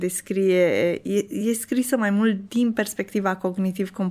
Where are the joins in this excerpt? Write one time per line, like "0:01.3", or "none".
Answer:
none